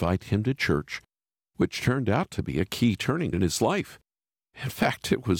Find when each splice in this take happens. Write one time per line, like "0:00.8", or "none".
0:03.3